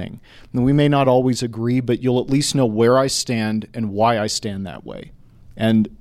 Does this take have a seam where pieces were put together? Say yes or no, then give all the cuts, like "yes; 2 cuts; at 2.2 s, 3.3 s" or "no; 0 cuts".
no; 0 cuts